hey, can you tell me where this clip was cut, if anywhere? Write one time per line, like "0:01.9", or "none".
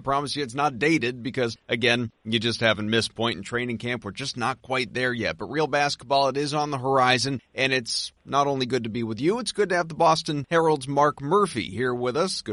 0:03.1

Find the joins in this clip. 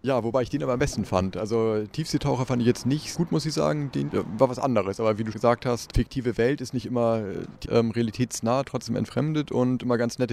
0:03.1
0:04.1
0:05.3
0:07.6

